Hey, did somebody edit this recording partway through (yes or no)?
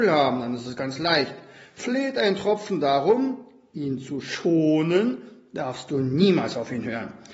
no